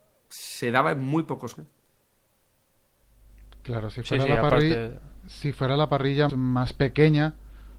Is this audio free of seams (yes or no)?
no